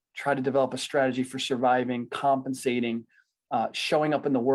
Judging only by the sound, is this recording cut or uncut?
uncut